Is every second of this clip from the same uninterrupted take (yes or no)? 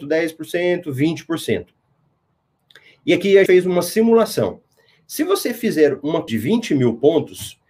no